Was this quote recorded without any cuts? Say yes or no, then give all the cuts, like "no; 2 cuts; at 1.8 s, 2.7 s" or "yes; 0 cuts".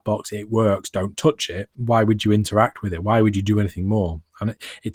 no; 1 cut; at 1.7 s